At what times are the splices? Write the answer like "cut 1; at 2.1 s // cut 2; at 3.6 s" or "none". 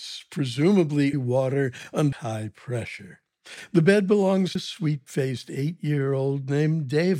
cut 1; at 1.1 s // cut 2; at 2.1 s // cut 3; at 4.6 s